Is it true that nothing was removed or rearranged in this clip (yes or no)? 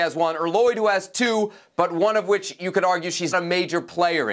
no